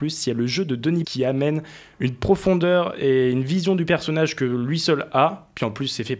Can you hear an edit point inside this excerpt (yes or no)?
yes